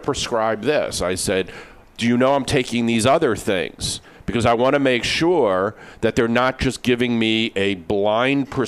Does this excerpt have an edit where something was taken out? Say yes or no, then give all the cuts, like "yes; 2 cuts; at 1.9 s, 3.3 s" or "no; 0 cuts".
no; 0 cuts